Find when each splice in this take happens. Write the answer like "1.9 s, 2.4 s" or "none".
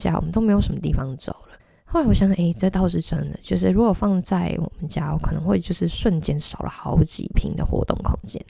1.6 s